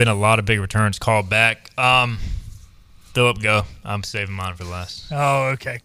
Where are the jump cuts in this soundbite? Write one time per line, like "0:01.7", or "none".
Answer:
none